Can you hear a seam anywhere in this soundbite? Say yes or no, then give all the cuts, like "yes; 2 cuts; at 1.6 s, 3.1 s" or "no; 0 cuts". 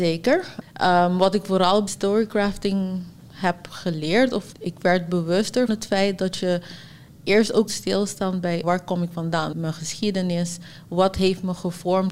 yes; 7 cuts; at 1.9 s, 4.5 s, 5.7 s, 7.1 s, 7.7 s, 8.6 s, 9.5 s